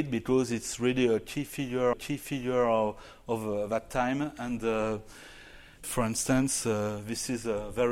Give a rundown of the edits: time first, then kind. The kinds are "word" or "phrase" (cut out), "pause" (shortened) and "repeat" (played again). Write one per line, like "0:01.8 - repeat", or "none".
0:01.9 - repeat
0:05.8 - word

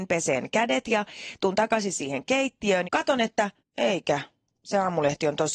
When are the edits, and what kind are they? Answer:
0:02.8 - word
0:03.6 - pause

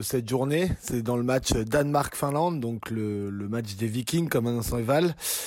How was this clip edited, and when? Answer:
none

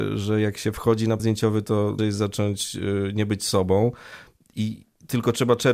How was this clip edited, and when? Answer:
0:01.2 - word
0:02.0 - word

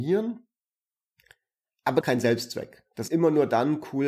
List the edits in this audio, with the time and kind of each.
0:02.0 - phrase
0:03.1 - word

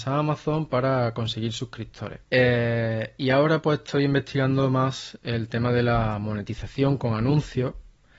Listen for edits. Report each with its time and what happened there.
0:02.2 - pause

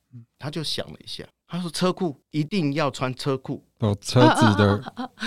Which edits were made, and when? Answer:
0:01.3 - pause
0:02.2 - pause

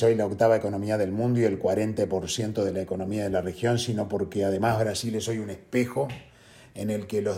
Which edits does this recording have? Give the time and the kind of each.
none

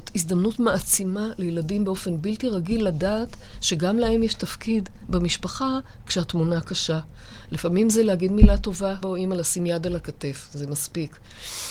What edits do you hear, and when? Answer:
0:09.0 - word

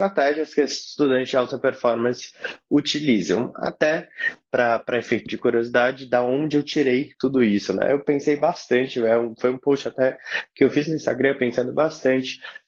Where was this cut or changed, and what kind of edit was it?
0:05.3 - word
0:07.1 - pause

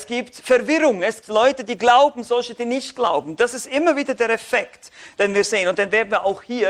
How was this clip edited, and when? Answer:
0:01.2 - word

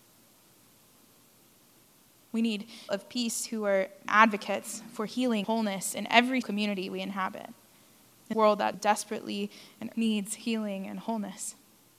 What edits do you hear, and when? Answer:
0:02.9 - word
0:04.1 - word
0:05.4 - word
0:06.4 - word
0:08.3 - word
0:08.7 - word
0:09.9 - word

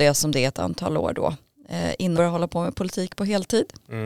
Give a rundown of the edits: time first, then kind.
0:02.2 - word

